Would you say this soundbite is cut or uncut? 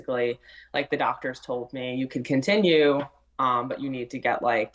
uncut